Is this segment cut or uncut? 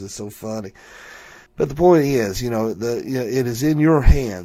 cut